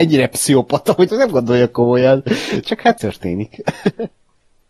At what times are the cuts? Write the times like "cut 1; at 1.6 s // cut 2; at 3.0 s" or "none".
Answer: cut 1; at 1.1 s // cut 2; at 2.6 s // cut 3; at 3.0 s

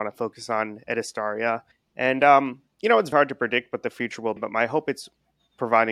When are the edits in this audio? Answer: cut 1; at 1.7 s // cut 2; at 3.1 s // cut 3; at 4.4 s

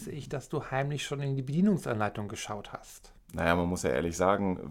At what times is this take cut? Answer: none

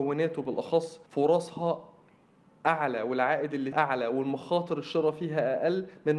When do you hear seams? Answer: cut 1; at 1.1 s // cut 2; at 3.7 s

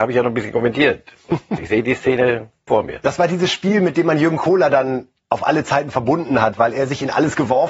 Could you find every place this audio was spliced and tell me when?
cut 1; at 1.6 s // cut 2; at 2.7 s

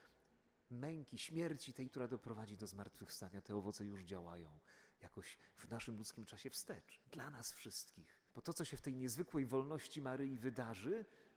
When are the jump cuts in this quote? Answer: cut 1; at 1.9 s // cut 2; at 7.0 s // cut 3; at 8.3 s

